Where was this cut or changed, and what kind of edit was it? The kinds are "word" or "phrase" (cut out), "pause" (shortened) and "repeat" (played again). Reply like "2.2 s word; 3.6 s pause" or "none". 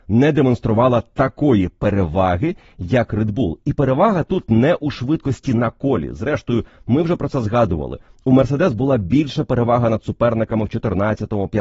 none